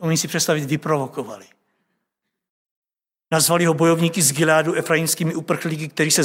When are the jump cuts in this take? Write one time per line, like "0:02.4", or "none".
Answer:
none